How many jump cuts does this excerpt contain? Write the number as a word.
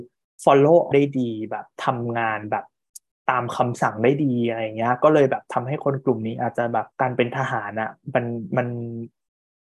three